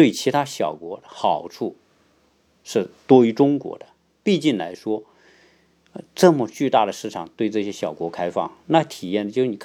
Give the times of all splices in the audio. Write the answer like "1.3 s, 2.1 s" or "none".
none